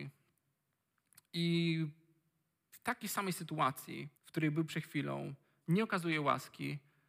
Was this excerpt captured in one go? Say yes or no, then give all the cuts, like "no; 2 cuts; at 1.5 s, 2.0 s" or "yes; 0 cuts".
no; 1 cut; at 4.2 s